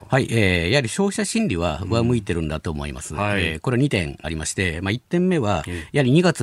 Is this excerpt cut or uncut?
cut